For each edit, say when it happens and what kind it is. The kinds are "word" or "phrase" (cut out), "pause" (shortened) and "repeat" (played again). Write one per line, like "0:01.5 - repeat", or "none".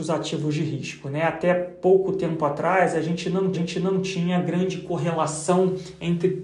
0:03.5 - repeat